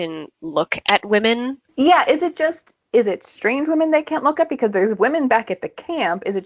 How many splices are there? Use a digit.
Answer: 0